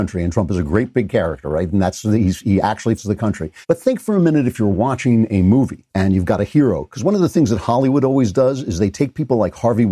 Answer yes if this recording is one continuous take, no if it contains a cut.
no